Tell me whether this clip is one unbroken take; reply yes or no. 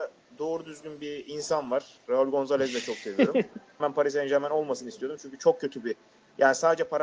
no